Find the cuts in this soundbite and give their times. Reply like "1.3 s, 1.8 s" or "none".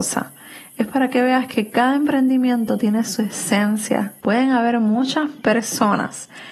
4.2 s